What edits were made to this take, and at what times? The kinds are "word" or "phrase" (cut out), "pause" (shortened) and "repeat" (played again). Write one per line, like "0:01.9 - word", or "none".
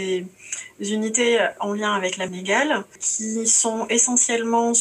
0:02.3 - word